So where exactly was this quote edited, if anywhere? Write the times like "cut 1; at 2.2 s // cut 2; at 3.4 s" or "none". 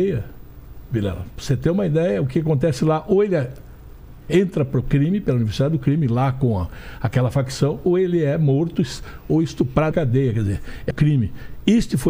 cut 1; at 9.9 s // cut 2; at 10.9 s